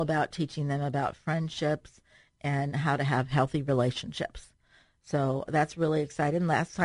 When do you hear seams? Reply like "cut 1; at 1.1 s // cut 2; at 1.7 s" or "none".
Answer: cut 1; at 5.5 s